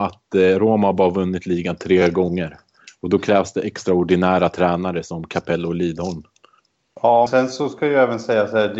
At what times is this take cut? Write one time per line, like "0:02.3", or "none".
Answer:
0:07.3